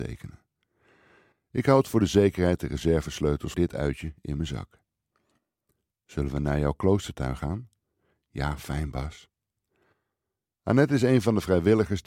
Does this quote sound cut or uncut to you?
cut